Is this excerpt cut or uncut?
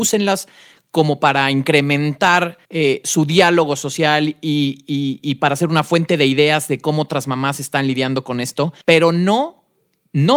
cut